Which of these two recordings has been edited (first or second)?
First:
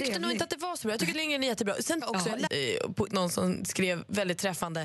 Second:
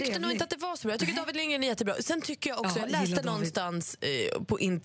first